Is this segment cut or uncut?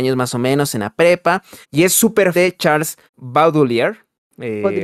cut